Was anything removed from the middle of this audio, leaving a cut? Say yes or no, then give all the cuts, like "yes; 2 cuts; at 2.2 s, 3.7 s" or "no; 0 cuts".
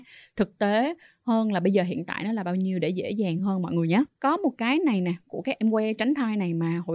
no; 0 cuts